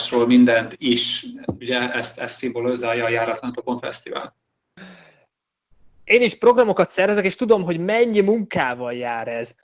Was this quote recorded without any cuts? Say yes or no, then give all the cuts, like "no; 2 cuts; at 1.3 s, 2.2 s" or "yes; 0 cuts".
yes; 0 cuts